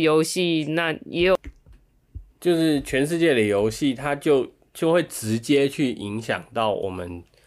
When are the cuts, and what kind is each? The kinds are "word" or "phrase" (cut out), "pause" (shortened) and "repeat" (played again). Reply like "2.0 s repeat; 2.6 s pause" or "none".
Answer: 2.3 s pause